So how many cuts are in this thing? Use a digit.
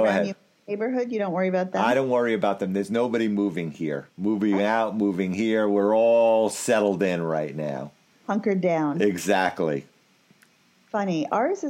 2